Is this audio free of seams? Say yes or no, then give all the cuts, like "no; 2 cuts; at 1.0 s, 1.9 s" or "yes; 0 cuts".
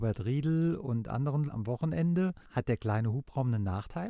no; 2 cuts; at 1.5 s, 2.4 s